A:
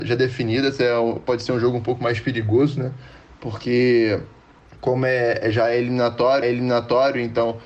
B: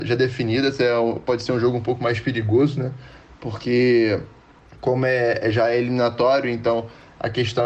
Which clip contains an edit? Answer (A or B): A